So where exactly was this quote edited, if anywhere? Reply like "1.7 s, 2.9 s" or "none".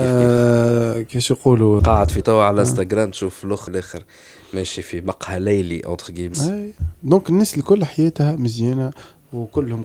1.8 s, 2.2 s, 3.7 s, 6.3 s